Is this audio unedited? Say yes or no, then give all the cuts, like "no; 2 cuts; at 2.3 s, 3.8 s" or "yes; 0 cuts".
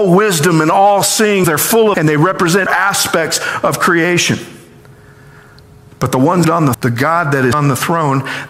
no; 6 cuts; at 1.4 s, 1.9 s, 2.7 s, 6.4 s, 6.7 s, 7.5 s